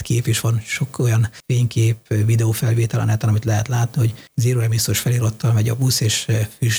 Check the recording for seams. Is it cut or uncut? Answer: uncut